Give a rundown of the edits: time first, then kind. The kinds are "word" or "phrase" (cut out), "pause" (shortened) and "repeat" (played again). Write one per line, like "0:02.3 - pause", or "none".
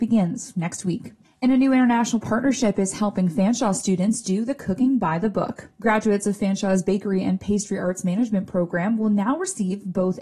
0:01.2 - pause
0:05.7 - pause